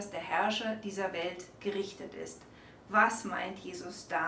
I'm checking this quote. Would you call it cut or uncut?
uncut